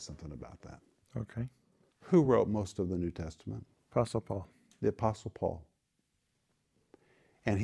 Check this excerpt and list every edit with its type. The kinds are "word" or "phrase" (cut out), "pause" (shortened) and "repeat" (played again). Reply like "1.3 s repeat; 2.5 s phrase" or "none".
none

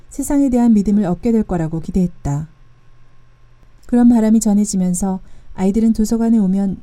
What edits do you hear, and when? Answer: none

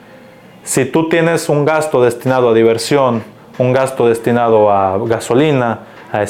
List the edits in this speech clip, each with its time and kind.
none

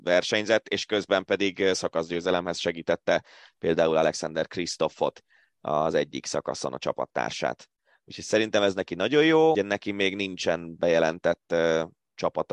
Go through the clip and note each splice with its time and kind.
9.5 s word

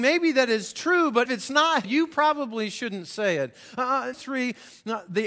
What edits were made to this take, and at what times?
1.3 s word; 1.8 s word; 4.1 s word

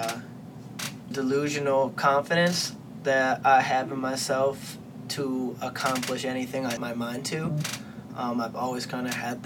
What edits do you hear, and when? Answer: 1.1 s word; 6.8 s word

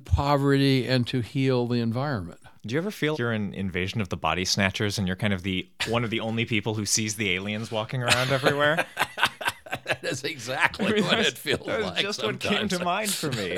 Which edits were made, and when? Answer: 2.6 s pause; 3.1 s word

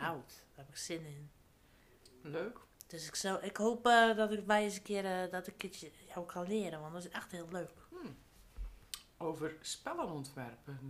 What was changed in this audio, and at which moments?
none

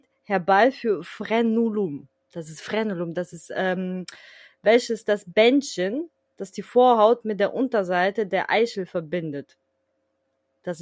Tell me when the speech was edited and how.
3.3 s phrase

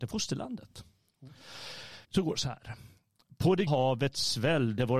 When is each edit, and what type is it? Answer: 2.0 s pause; 3.7 s word

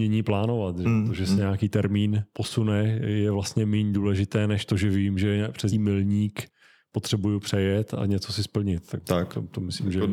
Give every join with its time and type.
5.7 s word

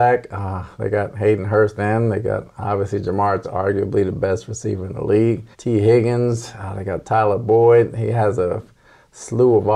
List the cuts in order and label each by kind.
1.8 s phrase; 3.4 s word; 5.5 s pause

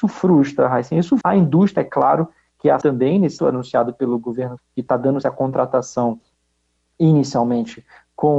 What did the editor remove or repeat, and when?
1.2 s word; 1.8 s word; 2.8 s word; 3.4 s word; 4.6 s word; 5.2 s word

